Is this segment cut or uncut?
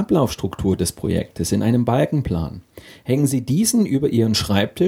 uncut